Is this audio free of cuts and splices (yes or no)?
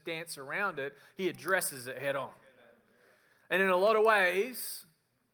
yes